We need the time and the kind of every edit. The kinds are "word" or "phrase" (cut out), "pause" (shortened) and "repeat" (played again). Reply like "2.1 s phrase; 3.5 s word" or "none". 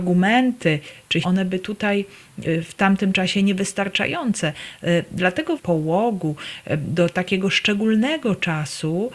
1.2 s word; 2.4 s word; 5.6 s phrase